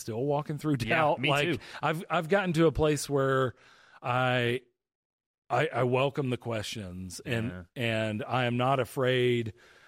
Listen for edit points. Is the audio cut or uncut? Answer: uncut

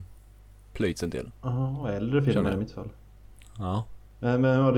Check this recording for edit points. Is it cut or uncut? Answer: uncut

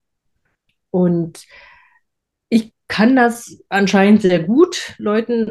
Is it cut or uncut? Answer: uncut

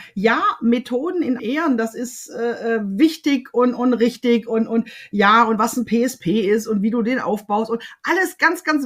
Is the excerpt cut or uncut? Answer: cut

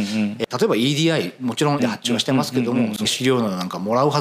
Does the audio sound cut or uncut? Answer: cut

